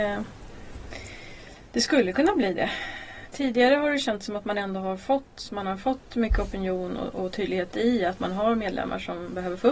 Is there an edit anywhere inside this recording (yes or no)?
no